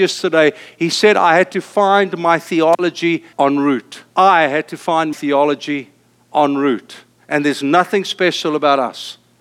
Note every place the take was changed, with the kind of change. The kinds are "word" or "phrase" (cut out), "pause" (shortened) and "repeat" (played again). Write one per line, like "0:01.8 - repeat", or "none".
0:03.3 - pause
0:04.1 - pause
0:05.1 - word